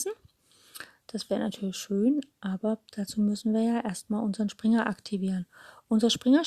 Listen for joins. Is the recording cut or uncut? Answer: uncut